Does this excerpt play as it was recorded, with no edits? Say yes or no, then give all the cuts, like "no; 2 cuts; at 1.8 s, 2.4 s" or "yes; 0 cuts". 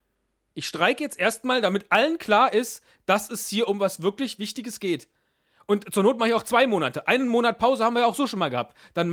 yes; 0 cuts